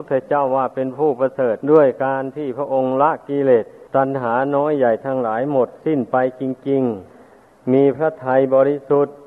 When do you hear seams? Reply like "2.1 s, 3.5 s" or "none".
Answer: 1.6 s, 3.9 s, 7.1 s